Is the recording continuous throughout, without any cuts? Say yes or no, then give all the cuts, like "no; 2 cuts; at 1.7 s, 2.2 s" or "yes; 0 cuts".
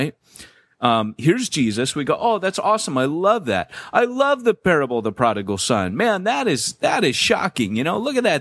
yes; 0 cuts